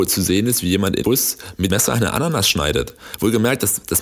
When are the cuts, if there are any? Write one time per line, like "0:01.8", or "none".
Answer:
0:01.0
0:01.7